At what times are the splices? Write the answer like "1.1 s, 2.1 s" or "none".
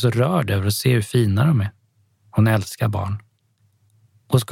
2.1 s